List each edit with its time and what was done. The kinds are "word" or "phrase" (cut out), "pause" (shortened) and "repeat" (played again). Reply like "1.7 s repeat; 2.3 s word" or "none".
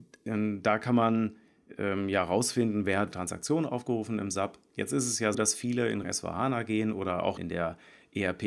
3.1 s word; 5.3 s word; 6.0 s word; 7.4 s word